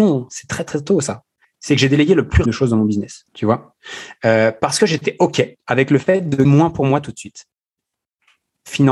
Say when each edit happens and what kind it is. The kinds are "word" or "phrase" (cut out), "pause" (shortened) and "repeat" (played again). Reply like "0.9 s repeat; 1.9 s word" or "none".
1.4 s pause; 2.5 s phrase; 3.3 s pause; 5.6 s pause; 6.4 s word